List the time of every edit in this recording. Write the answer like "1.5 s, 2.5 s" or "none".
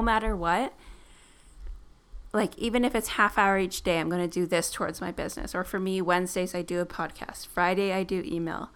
none